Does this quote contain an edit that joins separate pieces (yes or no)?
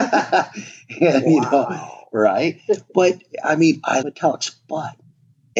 yes